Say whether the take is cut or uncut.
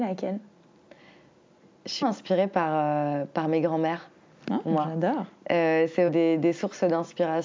cut